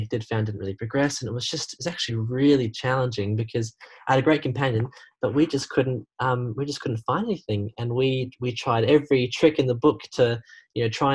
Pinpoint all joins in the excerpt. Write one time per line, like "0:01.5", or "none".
none